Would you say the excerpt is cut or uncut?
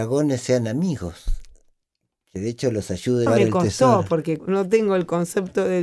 cut